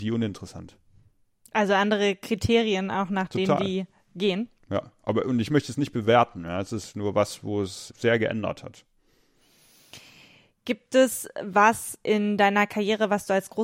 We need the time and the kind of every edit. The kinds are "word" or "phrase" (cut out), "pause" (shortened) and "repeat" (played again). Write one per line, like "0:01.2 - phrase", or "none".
0:07.9 - word